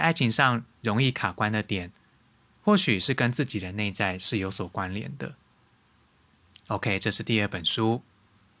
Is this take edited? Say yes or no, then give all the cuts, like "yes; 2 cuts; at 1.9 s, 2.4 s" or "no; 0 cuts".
no; 0 cuts